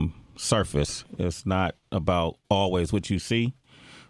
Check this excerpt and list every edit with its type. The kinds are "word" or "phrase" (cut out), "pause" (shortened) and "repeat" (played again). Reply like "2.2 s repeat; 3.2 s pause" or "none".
none